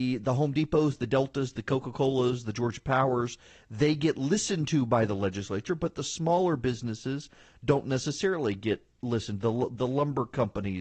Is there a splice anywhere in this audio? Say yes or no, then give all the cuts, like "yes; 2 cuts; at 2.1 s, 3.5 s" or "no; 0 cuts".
no; 0 cuts